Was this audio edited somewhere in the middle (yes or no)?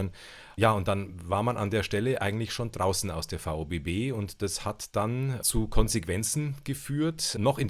no